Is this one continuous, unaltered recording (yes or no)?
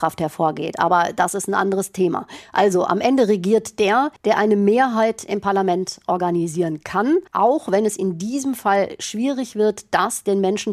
no